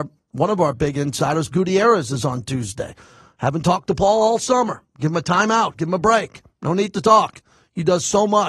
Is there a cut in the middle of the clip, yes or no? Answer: yes